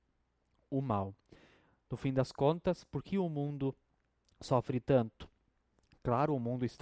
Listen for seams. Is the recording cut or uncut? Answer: uncut